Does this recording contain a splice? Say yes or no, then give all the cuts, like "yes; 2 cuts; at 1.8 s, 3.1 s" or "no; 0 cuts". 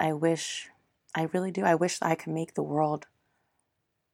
no; 0 cuts